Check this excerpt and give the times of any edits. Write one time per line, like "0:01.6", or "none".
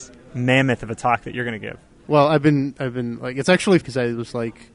0:03.8